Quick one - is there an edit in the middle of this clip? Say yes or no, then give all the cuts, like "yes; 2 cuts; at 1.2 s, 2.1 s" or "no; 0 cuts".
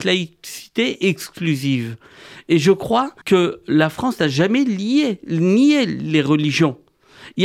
yes; 1 cut; at 3.2 s